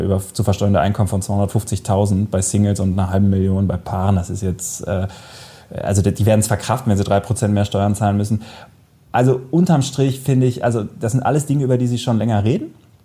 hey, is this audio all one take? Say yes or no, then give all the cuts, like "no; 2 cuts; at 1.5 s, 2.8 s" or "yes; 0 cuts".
yes; 0 cuts